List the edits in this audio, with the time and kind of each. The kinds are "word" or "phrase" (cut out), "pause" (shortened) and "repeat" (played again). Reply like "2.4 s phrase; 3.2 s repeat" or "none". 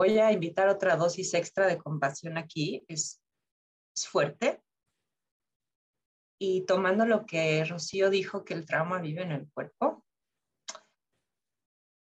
none